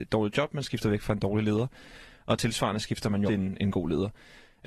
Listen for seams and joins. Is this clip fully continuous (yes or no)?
no